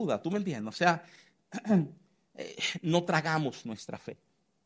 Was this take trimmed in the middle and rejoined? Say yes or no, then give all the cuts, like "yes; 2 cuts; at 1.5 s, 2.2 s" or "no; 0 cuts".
no; 0 cuts